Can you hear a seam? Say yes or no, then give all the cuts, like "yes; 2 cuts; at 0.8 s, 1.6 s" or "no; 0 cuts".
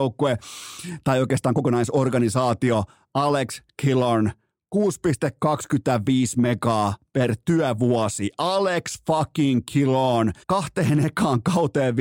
yes; 1 cut; at 10.4 s